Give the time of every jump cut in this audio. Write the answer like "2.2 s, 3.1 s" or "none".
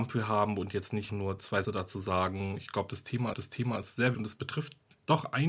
1.1 s, 1.6 s, 3.3 s, 4.1 s